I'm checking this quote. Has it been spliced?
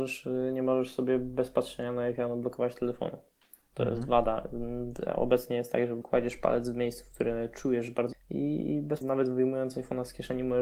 yes; 3 cuts; at 6.0 s, 8.1 s, 9.0 s

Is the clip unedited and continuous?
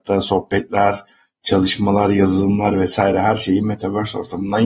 yes; 0 cuts

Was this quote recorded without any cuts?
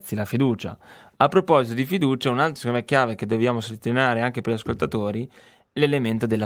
no; 1 cut; at 2.6 s

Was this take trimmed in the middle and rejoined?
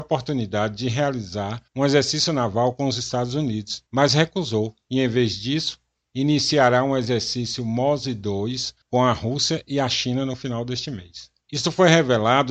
yes; 4 cuts; at 1.7 s, 3.9 s, 8.8 s, 11.4 s

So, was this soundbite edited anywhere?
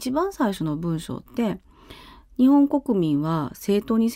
no; 0 cuts

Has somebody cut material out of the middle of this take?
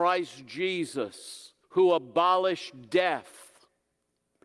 yes; 1 cut; at 1.6 s

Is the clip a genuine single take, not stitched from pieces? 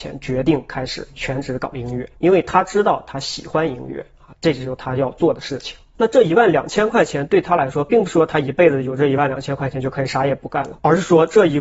no; 1 cut; at 2.2 s

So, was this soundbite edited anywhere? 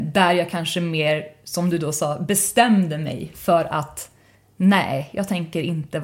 no; 0 cuts

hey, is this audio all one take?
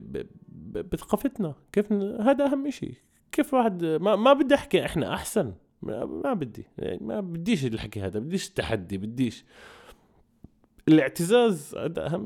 yes; 0 cuts

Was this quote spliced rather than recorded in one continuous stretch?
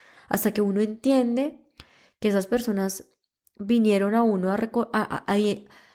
no; 0 cuts

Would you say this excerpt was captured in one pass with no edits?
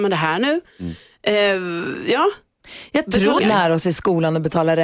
no; 1 cut; at 3.4 s

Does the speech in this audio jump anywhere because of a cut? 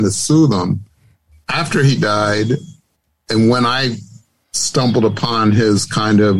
no; 0 cuts

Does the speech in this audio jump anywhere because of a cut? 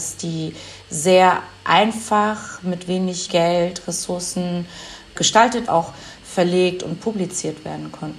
yes; 2 cuts; at 3.3 s, 5.7 s

